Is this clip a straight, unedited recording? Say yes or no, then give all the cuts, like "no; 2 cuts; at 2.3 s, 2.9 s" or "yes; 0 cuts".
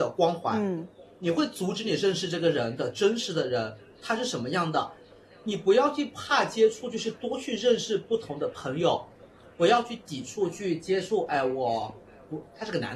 yes; 0 cuts